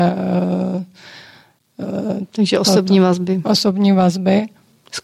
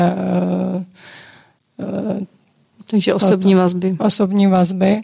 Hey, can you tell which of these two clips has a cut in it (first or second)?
first